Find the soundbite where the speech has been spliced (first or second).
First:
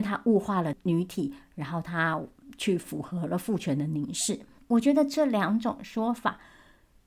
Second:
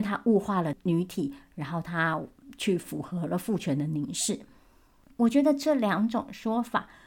first